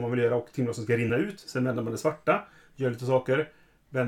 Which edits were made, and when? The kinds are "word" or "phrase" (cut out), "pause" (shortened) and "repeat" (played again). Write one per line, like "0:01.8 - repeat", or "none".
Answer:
none